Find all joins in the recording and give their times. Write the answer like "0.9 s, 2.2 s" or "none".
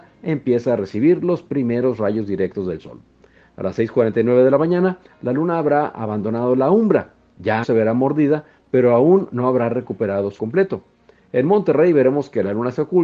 7.6 s, 10.4 s